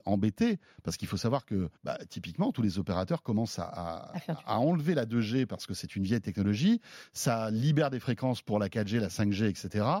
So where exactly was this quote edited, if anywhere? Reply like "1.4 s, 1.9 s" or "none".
1.8 s

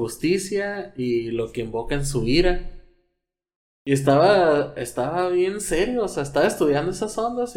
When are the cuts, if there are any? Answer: none

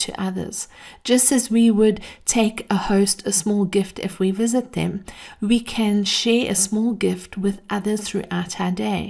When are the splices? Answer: none

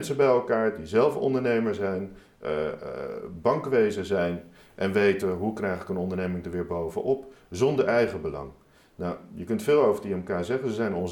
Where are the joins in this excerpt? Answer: none

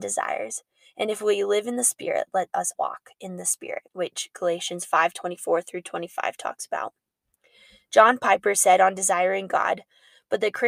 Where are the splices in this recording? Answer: 2.7 s, 3.9 s

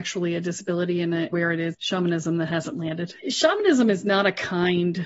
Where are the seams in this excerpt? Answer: 1.3 s, 1.7 s, 3.2 s

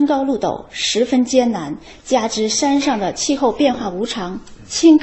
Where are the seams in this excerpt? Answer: none

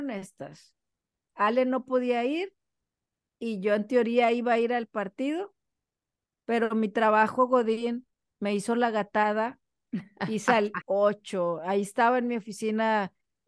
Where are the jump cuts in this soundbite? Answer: 10.8 s

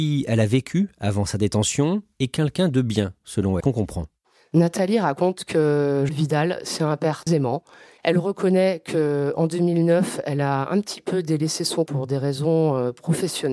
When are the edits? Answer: 3.6 s, 6.1 s, 7.3 s, 11.9 s

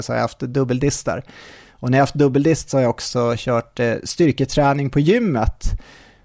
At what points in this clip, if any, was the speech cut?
none

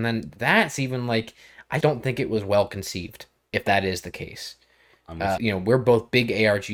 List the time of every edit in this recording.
1.8 s, 5.4 s

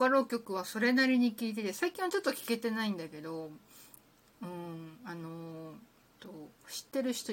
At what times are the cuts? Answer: 6.1 s

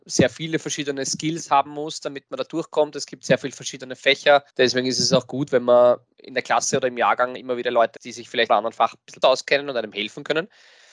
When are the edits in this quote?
4.5 s, 8.0 s, 8.5 s, 9.2 s

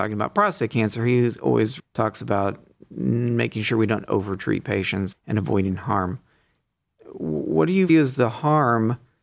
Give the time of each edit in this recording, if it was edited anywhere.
1.8 s, 5.1 s, 7.9 s

